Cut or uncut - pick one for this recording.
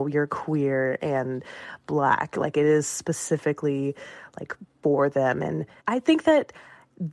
uncut